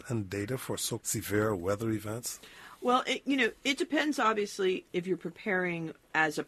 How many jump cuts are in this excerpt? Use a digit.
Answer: 2